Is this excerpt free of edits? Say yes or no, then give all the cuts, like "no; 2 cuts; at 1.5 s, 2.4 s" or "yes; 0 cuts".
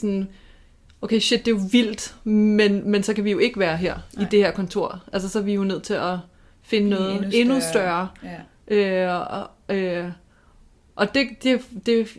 yes; 0 cuts